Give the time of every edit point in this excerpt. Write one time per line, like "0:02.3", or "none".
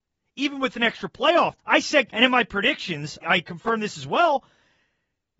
0:01.6
0:02.1
0:03.2